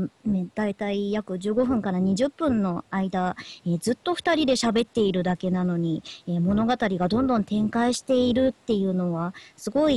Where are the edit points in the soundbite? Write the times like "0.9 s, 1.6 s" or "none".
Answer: none